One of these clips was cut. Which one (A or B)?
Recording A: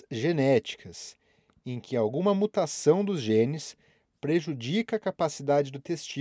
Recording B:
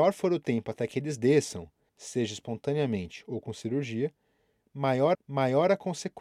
B